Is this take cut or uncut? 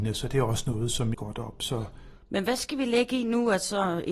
cut